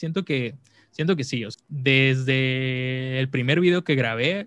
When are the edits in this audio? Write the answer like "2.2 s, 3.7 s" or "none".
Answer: 1.5 s